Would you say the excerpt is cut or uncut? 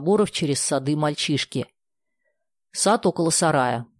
uncut